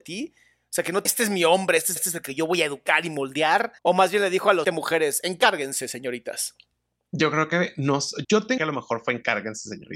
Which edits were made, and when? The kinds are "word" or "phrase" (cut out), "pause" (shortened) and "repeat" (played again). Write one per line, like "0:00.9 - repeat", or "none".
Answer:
0:01.1 - phrase
0:02.0 - repeat
0:03.8 - pause
0:04.6 - word
0:08.2 - word
0:08.6 - phrase